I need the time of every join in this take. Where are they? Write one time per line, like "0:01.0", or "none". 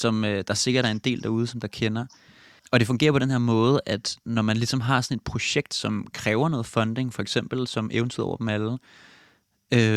none